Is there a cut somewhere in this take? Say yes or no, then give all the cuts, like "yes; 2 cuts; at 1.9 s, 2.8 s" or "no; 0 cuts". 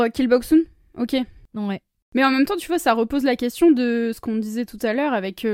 no; 0 cuts